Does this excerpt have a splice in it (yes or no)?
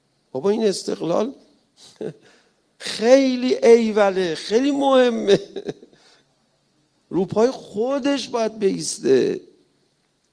no